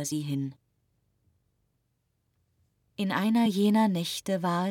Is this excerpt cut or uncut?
uncut